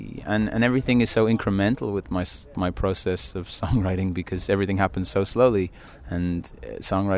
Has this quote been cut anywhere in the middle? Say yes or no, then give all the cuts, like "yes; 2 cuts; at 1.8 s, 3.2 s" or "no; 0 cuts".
no; 0 cuts